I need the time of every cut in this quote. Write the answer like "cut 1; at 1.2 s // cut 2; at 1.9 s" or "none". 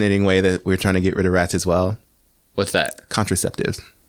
none

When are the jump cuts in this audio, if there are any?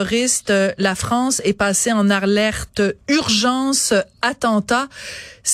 none

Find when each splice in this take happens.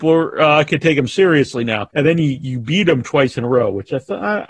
cut 1; at 1.9 s

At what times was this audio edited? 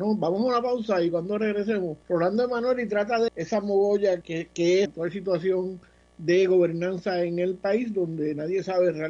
cut 1; at 2.0 s // cut 2; at 3.3 s // cut 3; at 4.2 s // cut 4; at 4.9 s

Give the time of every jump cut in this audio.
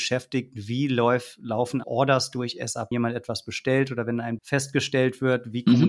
cut 1; at 1.8 s // cut 2; at 2.9 s // cut 3; at 4.4 s

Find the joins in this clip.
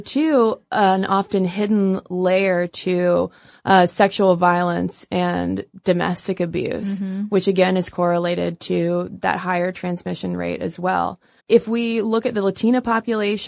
cut 1; at 11.4 s

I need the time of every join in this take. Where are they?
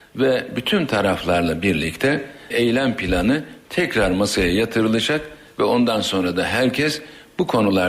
cut 1; at 2.5 s

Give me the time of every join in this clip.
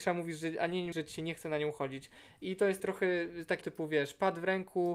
cut 1; at 0.9 s // cut 2; at 2.8 s // cut 3; at 3.6 s

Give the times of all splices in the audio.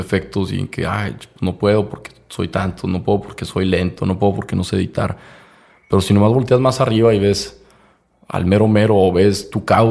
none

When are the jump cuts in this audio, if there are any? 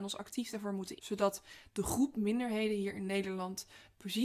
cut 1; at 1.0 s

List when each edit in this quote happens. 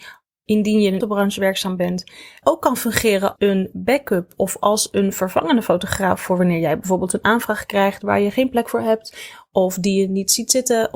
cut 1; at 1.0 s // cut 2; at 2.4 s // cut 3; at 3.4 s

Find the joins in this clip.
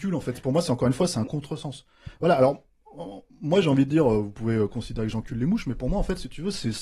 cut 1; at 3.3 s

